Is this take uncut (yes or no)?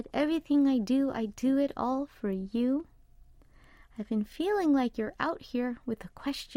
yes